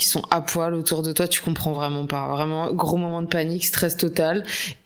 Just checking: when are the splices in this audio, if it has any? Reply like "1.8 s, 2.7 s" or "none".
none